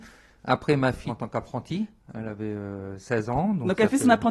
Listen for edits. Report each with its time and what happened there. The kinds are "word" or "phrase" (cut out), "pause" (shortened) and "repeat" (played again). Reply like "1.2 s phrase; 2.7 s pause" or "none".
1.1 s phrase